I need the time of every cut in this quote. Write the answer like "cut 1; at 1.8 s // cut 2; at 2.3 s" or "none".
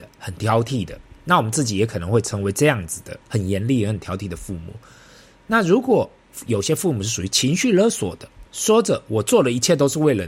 cut 1; at 3.2 s // cut 2; at 8.5 s